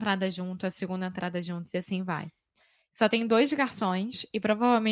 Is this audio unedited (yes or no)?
yes